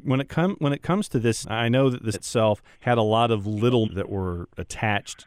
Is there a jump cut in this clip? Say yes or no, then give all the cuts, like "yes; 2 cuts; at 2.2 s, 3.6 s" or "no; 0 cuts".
yes; 4 cuts; at 1.4 s, 2.1 s, 2.7 s, 3.8 s